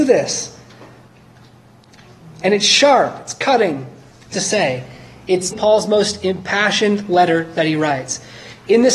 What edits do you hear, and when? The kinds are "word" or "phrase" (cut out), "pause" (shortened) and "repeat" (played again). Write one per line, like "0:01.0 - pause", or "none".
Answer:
0:04.3 - phrase
0:05.5 - word